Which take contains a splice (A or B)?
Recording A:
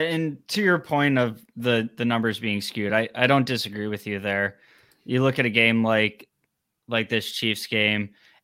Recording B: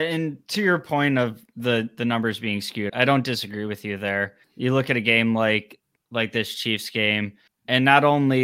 B